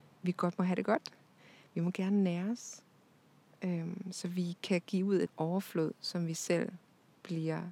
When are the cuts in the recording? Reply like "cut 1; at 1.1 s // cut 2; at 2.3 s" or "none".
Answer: cut 1; at 5.3 s